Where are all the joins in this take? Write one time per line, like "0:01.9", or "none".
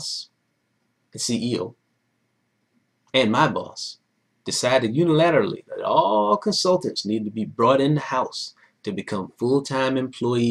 none

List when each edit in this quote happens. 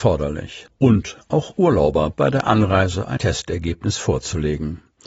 0:02.1
0:03.2

